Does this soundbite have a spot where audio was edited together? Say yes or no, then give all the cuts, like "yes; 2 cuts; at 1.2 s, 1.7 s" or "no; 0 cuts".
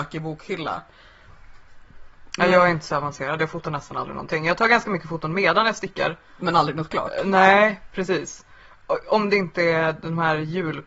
no; 0 cuts